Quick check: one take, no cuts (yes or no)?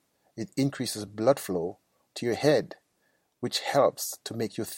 yes